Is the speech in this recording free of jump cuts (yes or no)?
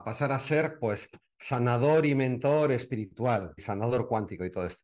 no